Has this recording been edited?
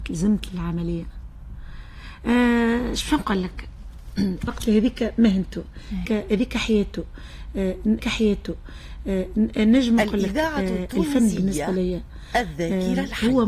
yes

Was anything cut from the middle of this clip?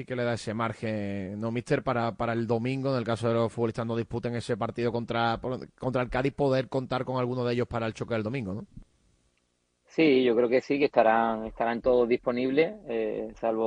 yes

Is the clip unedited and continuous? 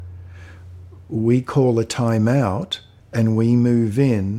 no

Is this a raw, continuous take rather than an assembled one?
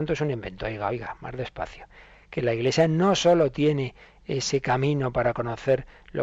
yes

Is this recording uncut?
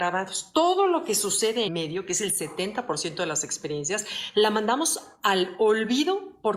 no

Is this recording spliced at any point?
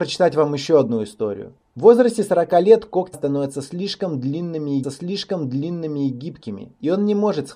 yes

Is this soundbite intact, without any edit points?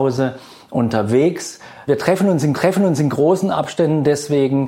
no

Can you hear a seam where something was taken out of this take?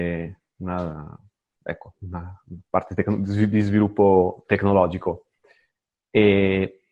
no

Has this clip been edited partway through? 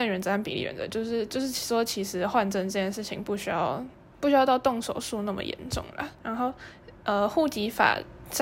no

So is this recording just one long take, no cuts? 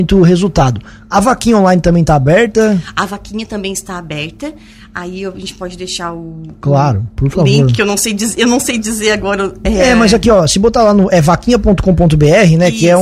yes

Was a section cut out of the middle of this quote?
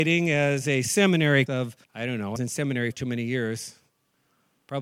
yes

